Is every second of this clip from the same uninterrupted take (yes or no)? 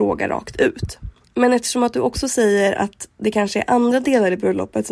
yes